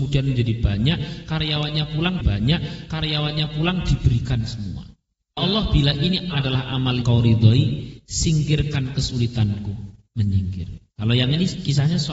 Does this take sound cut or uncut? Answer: cut